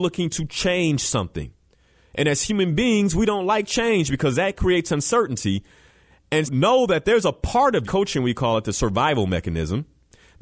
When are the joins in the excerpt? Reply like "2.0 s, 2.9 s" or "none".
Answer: 6.4 s, 7.8 s